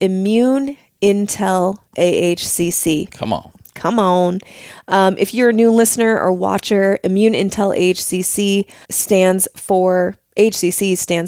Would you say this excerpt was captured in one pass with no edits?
no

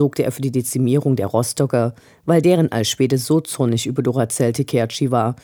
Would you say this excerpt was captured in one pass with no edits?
yes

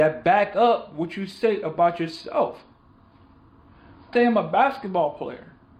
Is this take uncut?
no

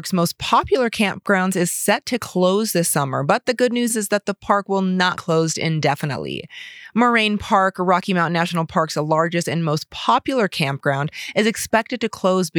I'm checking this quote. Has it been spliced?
yes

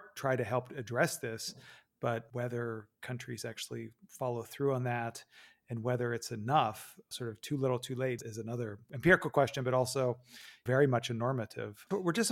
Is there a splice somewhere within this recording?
no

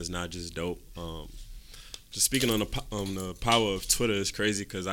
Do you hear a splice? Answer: no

